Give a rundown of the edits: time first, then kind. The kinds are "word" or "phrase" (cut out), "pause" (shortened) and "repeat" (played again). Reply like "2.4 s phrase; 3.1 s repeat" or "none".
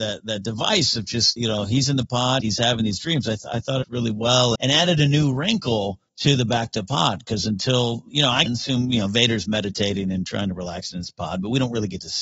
1.4 s word; 2.4 s word; 3.8 s phrase; 4.6 s word; 6.1 s pause; 8.1 s word; 8.5 s phrase

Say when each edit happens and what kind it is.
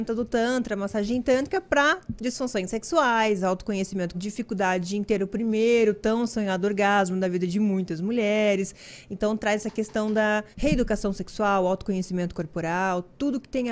2.2 s word; 4.1 s word; 10.5 s pause

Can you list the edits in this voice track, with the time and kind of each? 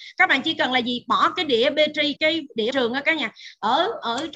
2.2 s word; 2.7 s word

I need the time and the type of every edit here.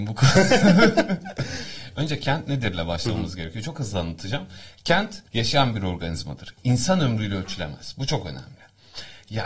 5.3 s pause

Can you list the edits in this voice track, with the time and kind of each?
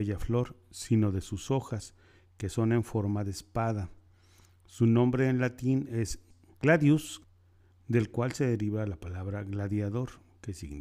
none

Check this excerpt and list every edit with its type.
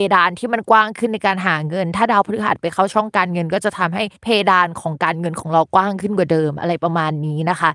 4.2 s pause

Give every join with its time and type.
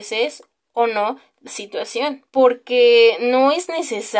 1.5 s word; 2.3 s pause

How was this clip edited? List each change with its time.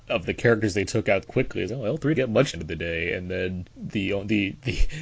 1.2 s word; 1.7 s word; 2.1 s word; 2.5 s phrase; 3.7 s pause

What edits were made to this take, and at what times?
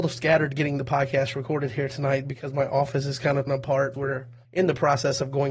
3.5 s word; 3.9 s word; 4.4 s pause

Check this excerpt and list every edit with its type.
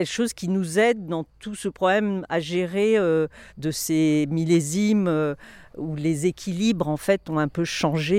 1.3 s pause; 3.5 s pause

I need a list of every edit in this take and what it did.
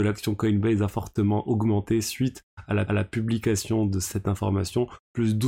2.9 s repeat

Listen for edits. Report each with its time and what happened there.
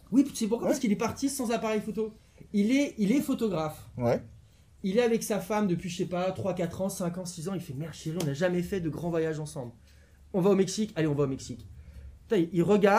none

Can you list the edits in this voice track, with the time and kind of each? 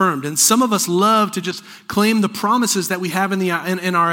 none

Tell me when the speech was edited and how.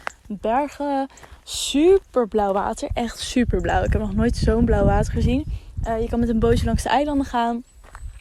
none

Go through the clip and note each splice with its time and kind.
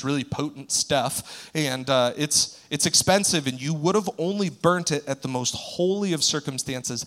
none

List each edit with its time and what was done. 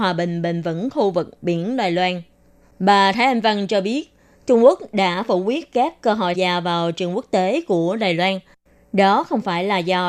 6.3 s word

